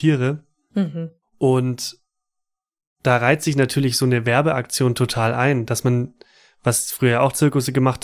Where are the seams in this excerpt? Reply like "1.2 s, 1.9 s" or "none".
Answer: none